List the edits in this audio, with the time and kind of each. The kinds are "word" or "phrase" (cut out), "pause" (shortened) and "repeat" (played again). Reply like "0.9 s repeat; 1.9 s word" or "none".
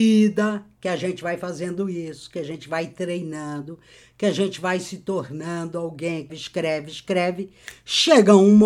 6.3 s word

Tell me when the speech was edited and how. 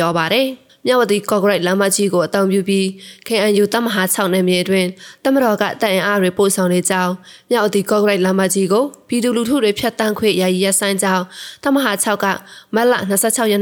none

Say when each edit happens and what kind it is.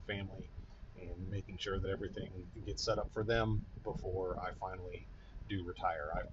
none

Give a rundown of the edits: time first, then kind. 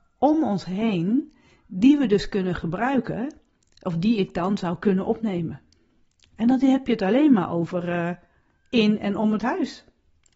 none

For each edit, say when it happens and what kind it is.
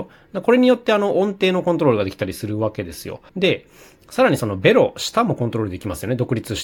3.3 s pause

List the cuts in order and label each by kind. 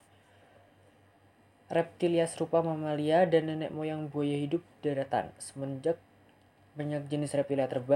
none

